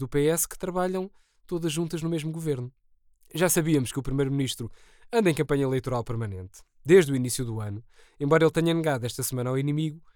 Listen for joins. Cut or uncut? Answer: uncut